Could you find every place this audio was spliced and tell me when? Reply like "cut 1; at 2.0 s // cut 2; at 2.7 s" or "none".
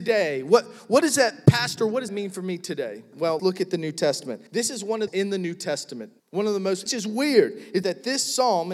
cut 1; at 2.1 s // cut 2; at 3.4 s // cut 3; at 4.5 s // cut 4; at 5.1 s // cut 5; at 6.2 s // cut 6; at 6.9 s // cut 7; at 7.8 s